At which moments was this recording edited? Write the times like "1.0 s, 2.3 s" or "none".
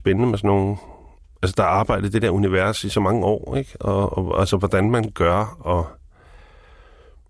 none